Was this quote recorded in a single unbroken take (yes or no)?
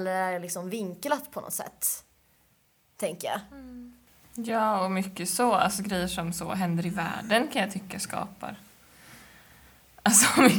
yes